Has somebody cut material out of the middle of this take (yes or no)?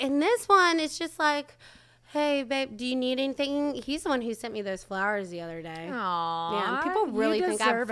no